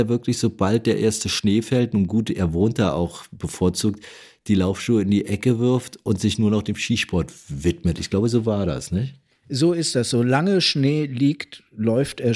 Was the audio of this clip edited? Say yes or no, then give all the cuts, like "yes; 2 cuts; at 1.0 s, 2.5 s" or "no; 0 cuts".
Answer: no; 0 cuts